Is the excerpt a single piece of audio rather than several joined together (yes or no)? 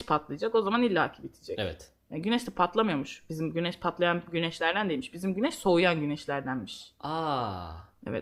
yes